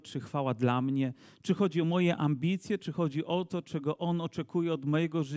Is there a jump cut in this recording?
no; 0 cuts

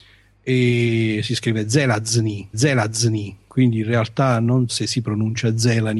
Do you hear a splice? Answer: yes; 2 cuts; at 2.5 s, 4.7 s

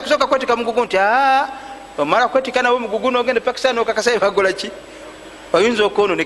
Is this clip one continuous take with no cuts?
yes; 0 cuts

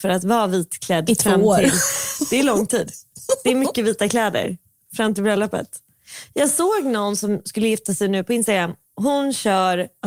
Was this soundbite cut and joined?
no; 0 cuts

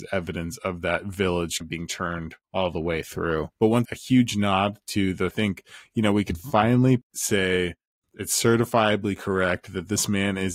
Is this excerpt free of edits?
no; 6 cuts; at 1.6 s, 2.4 s, 3.5 s, 3.8 s, 5.3 s, 8.0 s

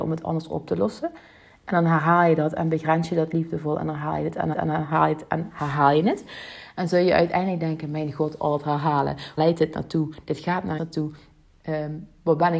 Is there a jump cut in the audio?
yes; 3 cuts; at 4.5 s, 9.4 s, 10.8 s

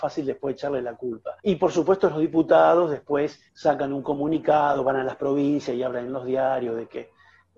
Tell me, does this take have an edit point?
yes; 2 cuts; at 1.4 s, 3.5 s

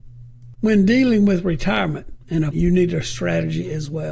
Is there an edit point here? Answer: yes; 1 cut; at 2.5 s

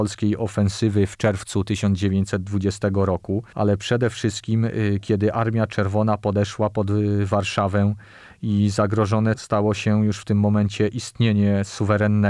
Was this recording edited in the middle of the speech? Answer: no; 0 cuts

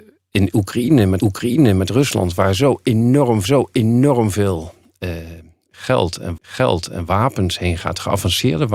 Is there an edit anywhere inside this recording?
yes; 3 cuts; at 1.2 s, 3.4 s, 6.4 s

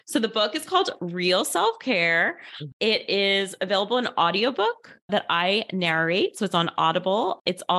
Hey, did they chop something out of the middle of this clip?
no; 0 cuts

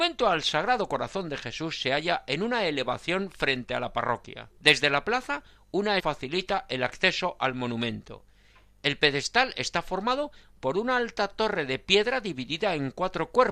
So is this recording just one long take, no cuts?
no; 2 cuts; at 4.6 s, 6.0 s

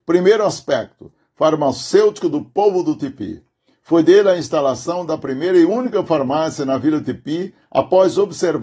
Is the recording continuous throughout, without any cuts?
yes; 0 cuts

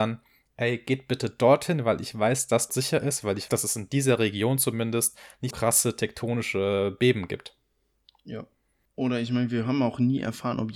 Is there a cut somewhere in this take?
yes; 3 cuts; at 2.7 s, 3.5 s, 5.5 s

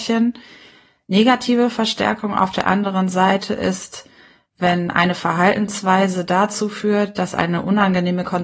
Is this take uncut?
yes; 0 cuts

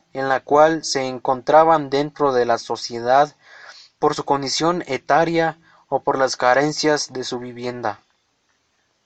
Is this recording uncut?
yes; 0 cuts

